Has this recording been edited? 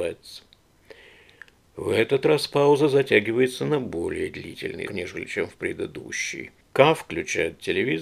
yes; 2 cuts; at 4.9 s, 6.6 s

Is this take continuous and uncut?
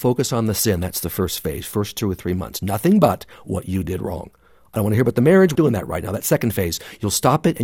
no; 1 cut; at 5.6 s

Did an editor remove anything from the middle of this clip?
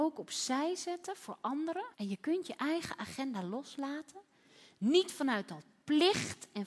yes; 1 cut; at 1.9 s

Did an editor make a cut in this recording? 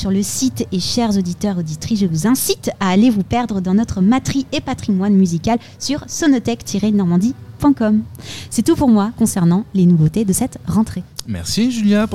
no; 0 cuts

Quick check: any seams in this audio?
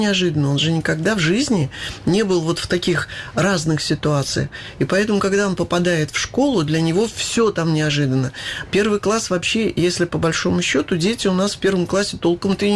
no; 0 cuts

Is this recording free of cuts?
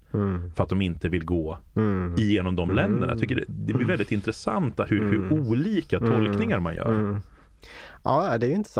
no; 1 cut; at 1.7 s

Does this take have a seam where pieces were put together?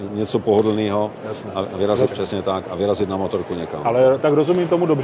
yes; 1 cut; at 2.1 s

